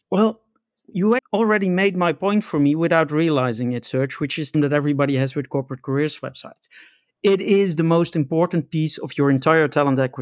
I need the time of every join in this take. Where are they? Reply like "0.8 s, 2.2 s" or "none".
1.2 s, 4.5 s